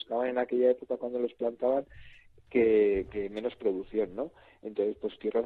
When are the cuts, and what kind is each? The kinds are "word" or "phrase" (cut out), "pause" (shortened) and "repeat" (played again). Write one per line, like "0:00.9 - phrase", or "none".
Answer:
none